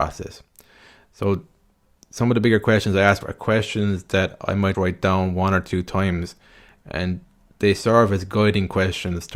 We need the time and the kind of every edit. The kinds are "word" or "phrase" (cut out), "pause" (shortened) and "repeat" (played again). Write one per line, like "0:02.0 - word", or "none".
0:03.2 - word
0:04.7 - word